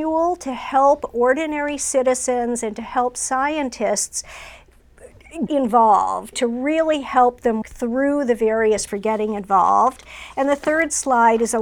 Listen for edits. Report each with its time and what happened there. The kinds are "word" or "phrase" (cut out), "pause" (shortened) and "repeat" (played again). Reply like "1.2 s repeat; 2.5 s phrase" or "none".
5.5 s word; 6.3 s word; 7.6 s word; 8.9 s word